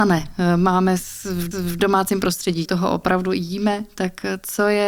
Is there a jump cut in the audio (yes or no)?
yes